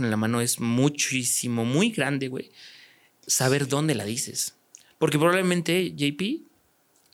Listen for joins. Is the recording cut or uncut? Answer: uncut